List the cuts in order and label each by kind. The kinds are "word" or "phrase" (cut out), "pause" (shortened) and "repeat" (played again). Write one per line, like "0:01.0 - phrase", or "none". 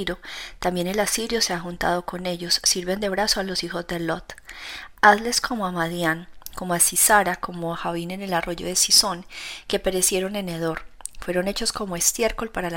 none